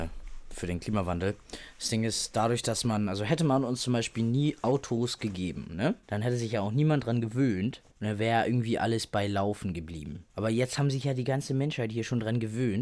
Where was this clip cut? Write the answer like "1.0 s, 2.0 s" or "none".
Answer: 6.0 s, 7.9 s, 10.3 s